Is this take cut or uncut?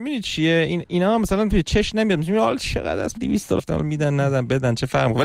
cut